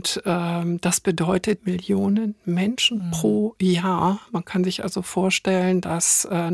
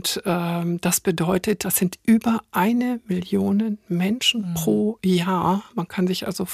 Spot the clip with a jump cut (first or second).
first